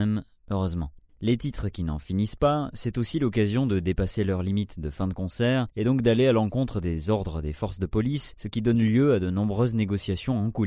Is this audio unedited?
yes; 0 cuts

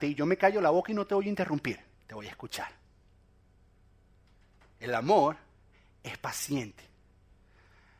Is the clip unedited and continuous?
no; 1 cut; at 1.9 s

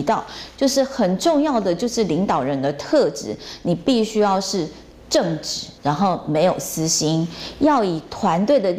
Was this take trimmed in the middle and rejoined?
yes; 1 cut; at 5.8 s

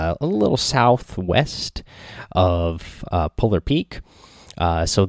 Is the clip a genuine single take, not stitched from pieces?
yes; 0 cuts

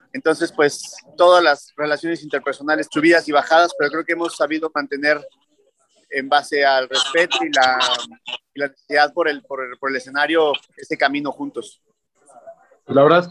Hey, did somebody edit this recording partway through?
yes; 2 cuts; at 2.9 s, 10.6 s

